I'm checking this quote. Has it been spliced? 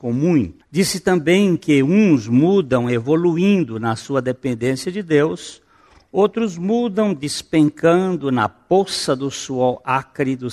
no; 0 cuts

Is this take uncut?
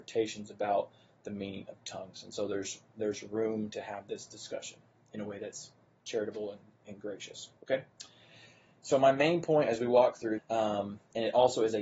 no; 2 cuts; at 7.6 s, 10.4 s

